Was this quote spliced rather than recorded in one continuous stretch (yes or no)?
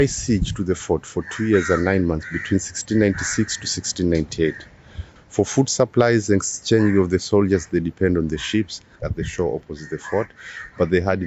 no